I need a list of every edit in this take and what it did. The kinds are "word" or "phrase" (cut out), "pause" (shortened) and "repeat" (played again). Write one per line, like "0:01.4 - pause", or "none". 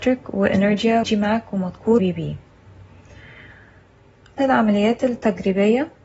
0:01.0 - word
0:02.0 - word
0:04.4 - word